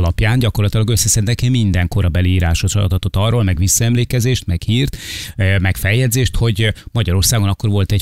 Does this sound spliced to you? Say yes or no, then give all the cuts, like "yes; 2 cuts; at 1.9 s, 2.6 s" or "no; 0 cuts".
no; 0 cuts